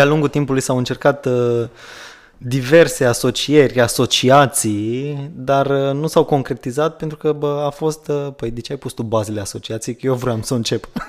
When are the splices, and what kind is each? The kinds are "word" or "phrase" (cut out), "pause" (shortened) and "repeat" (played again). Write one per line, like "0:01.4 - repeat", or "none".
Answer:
none